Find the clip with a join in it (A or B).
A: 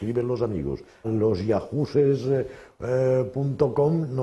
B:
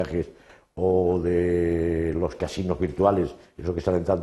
A